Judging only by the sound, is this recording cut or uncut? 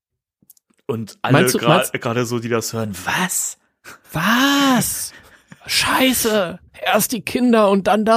cut